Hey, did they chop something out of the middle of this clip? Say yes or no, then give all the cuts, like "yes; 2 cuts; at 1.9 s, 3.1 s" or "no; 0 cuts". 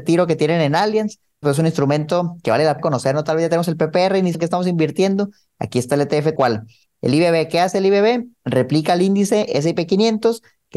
yes; 4 cuts; at 1.4 s, 2.8 s, 4.3 s, 6.4 s